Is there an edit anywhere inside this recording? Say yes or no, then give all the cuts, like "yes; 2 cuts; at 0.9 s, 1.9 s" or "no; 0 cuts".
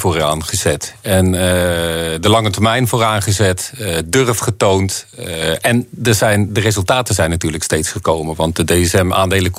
no; 0 cuts